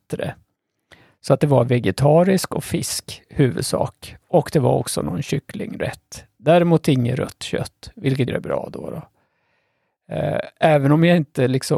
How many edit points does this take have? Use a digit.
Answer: 1